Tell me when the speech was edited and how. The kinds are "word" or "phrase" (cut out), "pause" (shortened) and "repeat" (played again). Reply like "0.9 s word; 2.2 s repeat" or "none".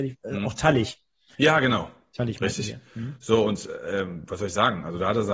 none